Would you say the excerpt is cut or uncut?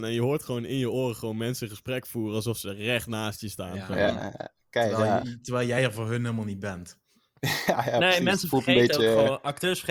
uncut